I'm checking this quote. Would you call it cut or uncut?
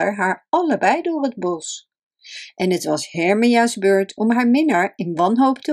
uncut